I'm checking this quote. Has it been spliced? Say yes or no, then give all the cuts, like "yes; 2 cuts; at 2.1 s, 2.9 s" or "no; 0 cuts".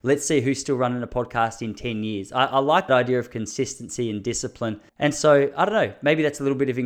yes; 2 cuts; at 2.9 s, 4.9 s